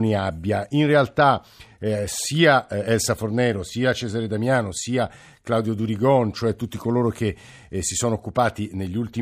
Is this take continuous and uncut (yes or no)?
yes